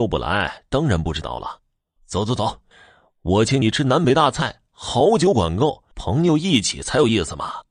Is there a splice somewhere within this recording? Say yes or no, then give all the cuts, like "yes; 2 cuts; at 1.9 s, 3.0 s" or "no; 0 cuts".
yes; 1 cut; at 5.9 s